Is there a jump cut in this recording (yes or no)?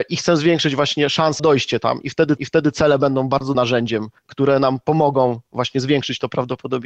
yes